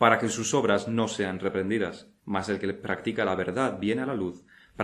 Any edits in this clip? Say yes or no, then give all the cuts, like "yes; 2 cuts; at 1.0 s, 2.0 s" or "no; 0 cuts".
yes; 1 cut; at 2.2 s